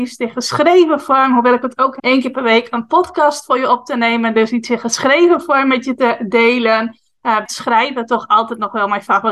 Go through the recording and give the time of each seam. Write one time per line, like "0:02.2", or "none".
0:02.0
0:07.5